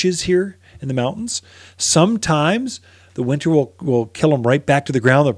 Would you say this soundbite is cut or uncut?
uncut